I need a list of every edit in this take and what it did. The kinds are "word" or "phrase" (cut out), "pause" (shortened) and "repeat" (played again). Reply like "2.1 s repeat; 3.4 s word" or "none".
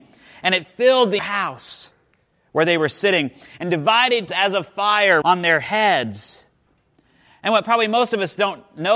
1.2 s word; 4.3 s word; 5.2 s word